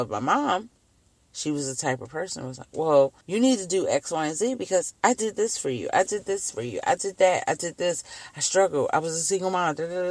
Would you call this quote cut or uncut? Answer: cut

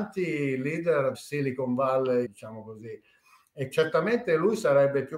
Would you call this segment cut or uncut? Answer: cut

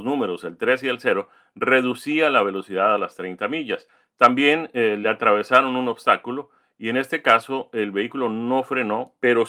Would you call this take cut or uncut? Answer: uncut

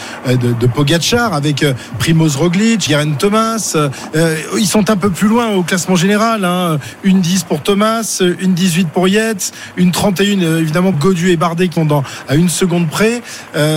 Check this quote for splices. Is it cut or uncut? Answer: cut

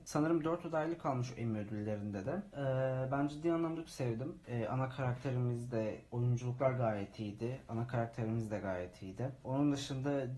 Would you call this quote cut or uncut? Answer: cut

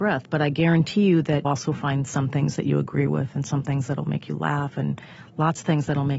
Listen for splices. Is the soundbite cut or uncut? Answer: cut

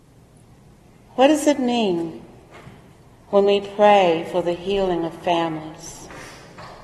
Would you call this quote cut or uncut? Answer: uncut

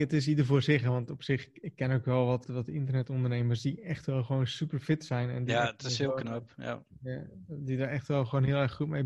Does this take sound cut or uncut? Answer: cut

